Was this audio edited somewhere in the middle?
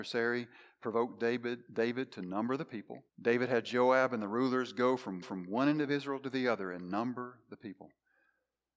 yes; 2 cuts; at 3.1 s, 5.2 s

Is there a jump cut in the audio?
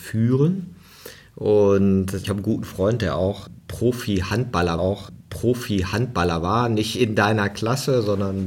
yes; 1 cut; at 4.8 s

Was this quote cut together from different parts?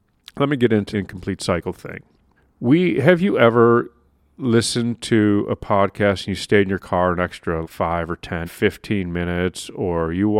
yes; 4 cuts; at 0.9 s, 2.4 s, 7.6 s, 8.4 s

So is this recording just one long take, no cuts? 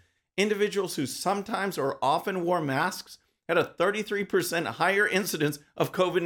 yes; 0 cuts

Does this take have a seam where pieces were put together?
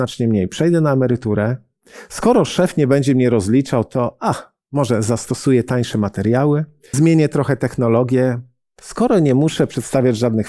yes; 1 cut; at 6.9 s

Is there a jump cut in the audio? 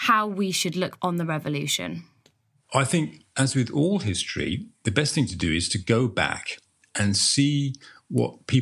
yes; 1 cut; at 1.0 s

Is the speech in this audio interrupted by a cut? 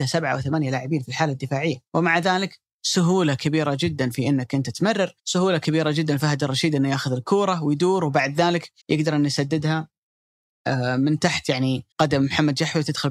yes; 4 cuts; at 1.9 s, 5.2 s, 8.8 s, 11.9 s

